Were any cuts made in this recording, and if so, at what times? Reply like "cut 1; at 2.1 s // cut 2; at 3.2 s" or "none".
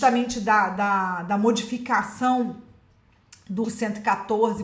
cut 1; at 3.6 s